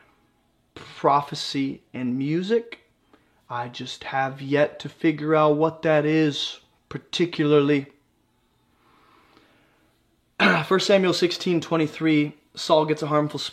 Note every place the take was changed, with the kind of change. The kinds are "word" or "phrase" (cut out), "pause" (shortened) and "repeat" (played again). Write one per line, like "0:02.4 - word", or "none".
none